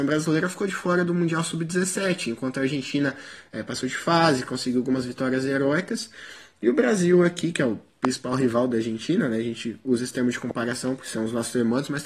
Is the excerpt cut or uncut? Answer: uncut